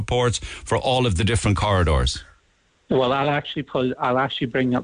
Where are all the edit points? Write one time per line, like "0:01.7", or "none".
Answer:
none